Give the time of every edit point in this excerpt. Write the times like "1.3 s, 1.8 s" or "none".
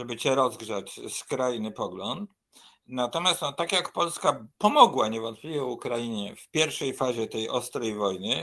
4.5 s